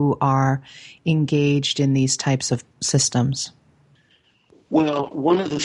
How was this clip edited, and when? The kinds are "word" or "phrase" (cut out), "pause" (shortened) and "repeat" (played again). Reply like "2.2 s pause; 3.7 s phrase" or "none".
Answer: none